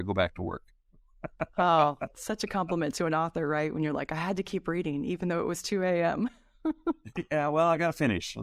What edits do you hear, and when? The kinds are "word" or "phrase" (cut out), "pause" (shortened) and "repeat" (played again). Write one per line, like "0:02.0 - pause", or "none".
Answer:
none